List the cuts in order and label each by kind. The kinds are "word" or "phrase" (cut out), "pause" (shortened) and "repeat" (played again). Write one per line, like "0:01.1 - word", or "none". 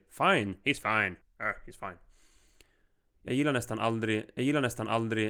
0:01.2 - pause
0:04.4 - repeat